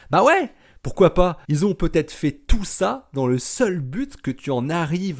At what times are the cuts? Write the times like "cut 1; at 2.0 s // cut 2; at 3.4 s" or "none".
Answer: cut 1; at 1.4 s